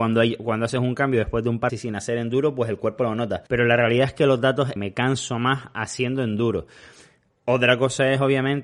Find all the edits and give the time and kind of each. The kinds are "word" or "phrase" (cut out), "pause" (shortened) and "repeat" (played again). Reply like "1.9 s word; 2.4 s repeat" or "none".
1.7 s phrase; 3.5 s pause; 4.8 s phrase